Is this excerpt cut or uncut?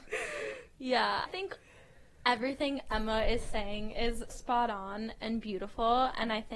cut